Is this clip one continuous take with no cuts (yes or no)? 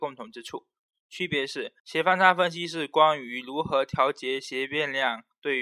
no